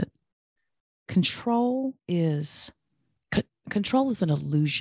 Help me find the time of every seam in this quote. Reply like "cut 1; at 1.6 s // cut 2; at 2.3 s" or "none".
cut 1; at 2.0 s